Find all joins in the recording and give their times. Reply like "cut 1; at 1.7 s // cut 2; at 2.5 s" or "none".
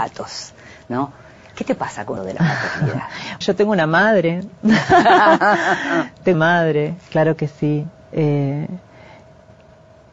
cut 1; at 2.2 s // cut 2; at 3.4 s // cut 3; at 6.3 s

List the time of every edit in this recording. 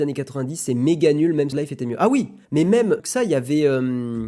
cut 1; at 1.5 s // cut 2; at 2.4 s // cut 3; at 3.0 s

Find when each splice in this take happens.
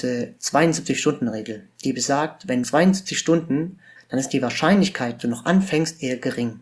cut 1; at 2.6 s // cut 2; at 4.0 s // cut 3; at 5.2 s

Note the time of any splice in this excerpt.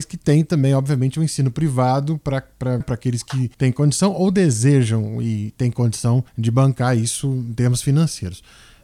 cut 1; at 2.8 s // cut 2; at 3.5 s // cut 3; at 6.3 s

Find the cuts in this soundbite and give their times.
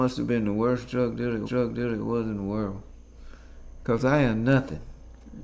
cut 1; at 1.4 s

